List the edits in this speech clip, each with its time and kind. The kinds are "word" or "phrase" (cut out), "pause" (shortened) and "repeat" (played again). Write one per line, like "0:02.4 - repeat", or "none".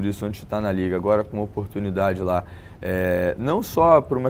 none